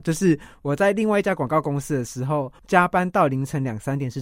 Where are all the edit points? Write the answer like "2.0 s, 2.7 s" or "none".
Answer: 2.5 s